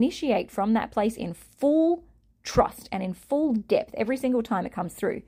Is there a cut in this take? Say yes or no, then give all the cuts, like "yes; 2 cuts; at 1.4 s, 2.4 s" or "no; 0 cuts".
no; 0 cuts